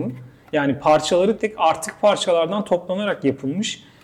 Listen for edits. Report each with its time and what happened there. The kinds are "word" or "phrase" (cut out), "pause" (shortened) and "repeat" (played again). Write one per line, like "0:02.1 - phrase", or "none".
0:01.4 - word